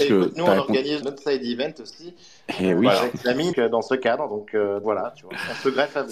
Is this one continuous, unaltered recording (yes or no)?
no